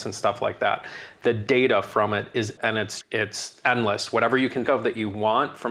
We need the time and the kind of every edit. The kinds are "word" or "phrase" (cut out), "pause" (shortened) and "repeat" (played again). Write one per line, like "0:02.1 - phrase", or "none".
0:02.6 - phrase
0:03.0 - word
0:04.6 - word